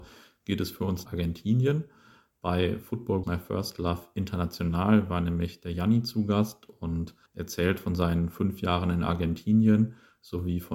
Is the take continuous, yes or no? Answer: no